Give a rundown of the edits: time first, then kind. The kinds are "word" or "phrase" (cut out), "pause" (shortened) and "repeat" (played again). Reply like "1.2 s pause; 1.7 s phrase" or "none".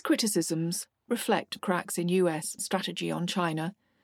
1.1 s word; 1.6 s word; 2.6 s word